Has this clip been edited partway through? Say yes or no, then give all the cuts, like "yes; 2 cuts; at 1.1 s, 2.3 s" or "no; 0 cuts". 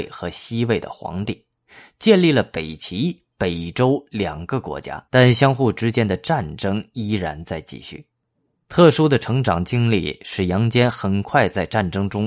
yes; 2 cuts; at 5.1 s, 8.3 s